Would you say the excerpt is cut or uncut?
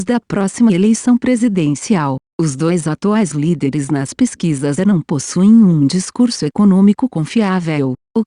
cut